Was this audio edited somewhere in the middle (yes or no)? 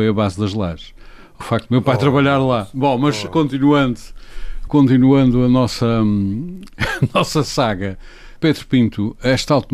yes